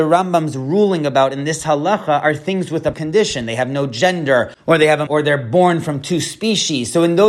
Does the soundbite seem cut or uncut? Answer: cut